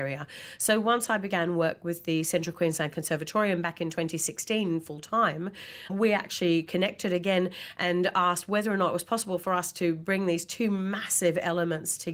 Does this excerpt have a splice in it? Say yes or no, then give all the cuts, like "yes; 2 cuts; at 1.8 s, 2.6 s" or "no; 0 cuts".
yes; 1 cut; at 5.9 s